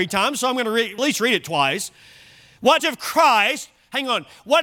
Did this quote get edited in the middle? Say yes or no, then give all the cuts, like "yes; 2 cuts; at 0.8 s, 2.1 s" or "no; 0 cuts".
yes; 2 cuts; at 1.0 s, 2.8 s